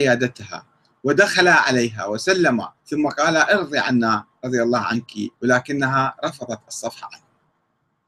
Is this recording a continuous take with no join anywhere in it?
no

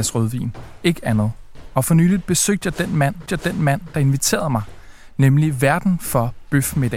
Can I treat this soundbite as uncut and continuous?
no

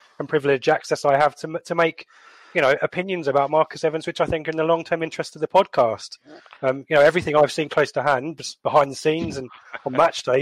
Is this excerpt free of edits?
yes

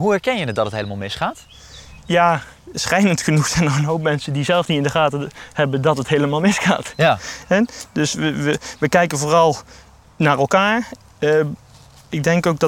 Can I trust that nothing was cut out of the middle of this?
yes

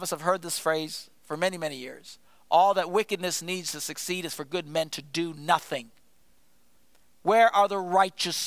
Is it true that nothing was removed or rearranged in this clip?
yes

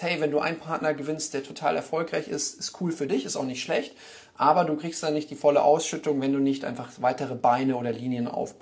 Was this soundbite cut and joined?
no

